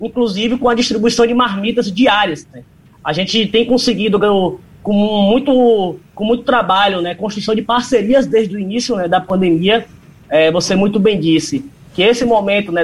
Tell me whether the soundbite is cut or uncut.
uncut